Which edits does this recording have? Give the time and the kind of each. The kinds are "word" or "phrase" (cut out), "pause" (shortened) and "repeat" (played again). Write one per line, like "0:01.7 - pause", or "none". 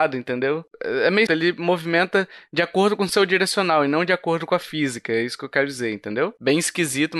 0:01.3 - word